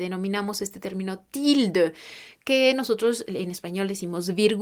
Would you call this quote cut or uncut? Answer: uncut